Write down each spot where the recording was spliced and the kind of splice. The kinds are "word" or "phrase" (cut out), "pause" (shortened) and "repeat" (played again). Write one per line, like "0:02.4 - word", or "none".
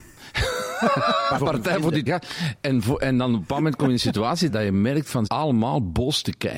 0:01.4 - word
0:02.1 - word
0:04.5 - word
0:05.3 - word